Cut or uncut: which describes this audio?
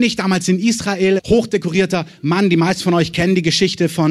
cut